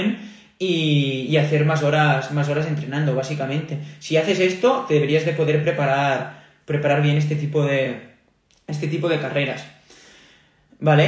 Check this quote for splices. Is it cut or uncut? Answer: uncut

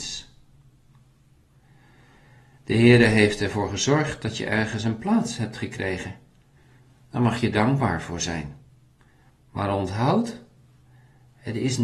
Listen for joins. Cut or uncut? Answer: uncut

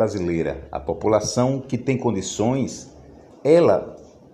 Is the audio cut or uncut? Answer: uncut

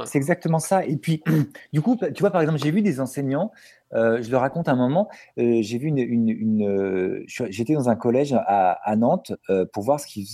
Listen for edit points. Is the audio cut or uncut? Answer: uncut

